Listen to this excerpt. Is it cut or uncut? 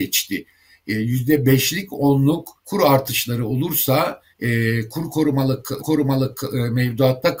cut